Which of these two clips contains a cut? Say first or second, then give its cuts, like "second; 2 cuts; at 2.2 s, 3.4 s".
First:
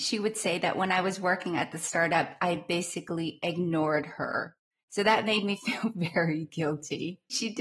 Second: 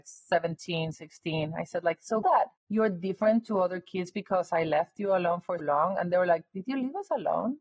second; 2 cuts; at 2.2 s, 5.6 s